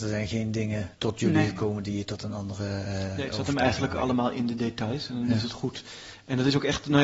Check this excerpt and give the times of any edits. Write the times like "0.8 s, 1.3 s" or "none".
0.9 s